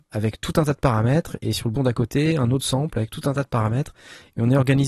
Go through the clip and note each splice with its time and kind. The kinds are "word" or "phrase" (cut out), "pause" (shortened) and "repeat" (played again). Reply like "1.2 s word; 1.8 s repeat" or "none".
1.8 s word